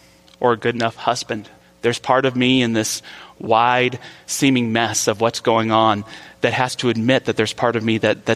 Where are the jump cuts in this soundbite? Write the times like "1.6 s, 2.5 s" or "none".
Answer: 1.6 s

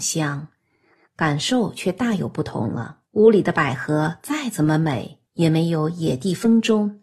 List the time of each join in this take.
3.1 s, 5.3 s

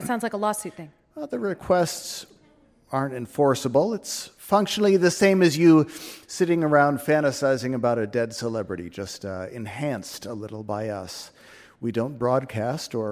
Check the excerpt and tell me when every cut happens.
none

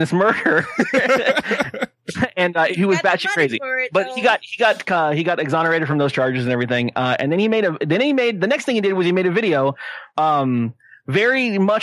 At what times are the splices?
none

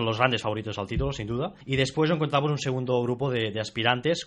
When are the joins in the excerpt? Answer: 1.6 s

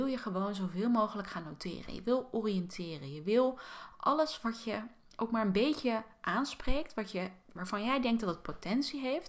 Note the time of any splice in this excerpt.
none

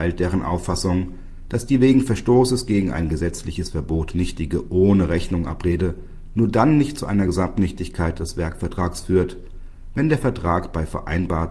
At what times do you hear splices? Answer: none

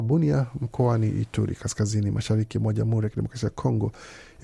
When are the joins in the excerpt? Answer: none

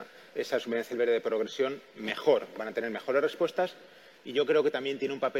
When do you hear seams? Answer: none

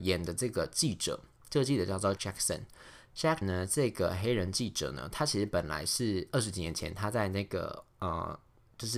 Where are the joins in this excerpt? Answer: 2.2 s, 3.4 s

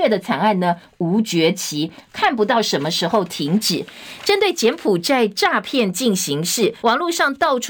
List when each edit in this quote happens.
6.8 s

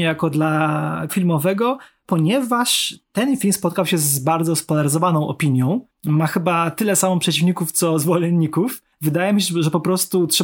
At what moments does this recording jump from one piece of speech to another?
1.1 s, 3.0 s

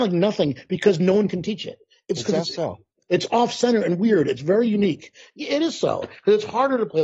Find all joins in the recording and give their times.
none

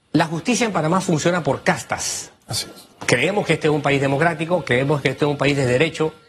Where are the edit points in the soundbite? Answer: 2.4 s, 2.9 s

